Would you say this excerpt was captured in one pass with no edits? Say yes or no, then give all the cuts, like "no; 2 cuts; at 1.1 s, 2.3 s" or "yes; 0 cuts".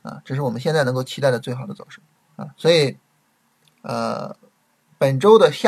no; 1 cut; at 2.1 s